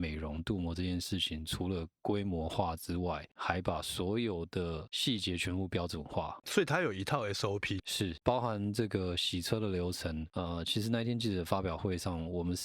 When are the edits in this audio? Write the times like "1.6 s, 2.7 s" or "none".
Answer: 7.8 s